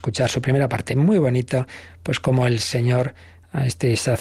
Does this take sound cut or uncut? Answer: uncut